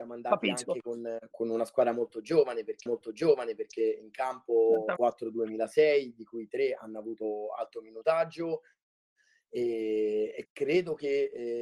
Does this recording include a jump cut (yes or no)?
yes